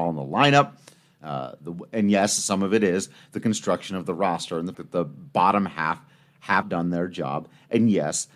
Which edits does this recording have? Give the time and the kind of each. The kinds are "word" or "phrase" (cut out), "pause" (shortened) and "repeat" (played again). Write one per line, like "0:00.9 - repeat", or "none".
0:04.7 - word
0:06.6 - word